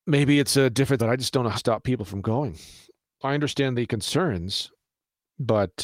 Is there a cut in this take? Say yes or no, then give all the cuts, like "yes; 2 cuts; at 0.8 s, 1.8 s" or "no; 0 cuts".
yes; 2 cuts; at 1.0 s, 1.5 s